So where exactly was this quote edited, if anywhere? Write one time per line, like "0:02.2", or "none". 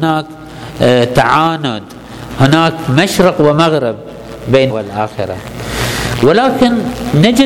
0:04.7